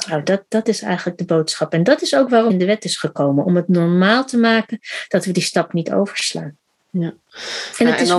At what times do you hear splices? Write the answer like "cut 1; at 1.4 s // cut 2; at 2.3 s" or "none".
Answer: cut 1; at 2.5 s